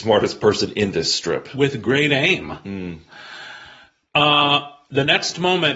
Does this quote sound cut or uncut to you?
uncut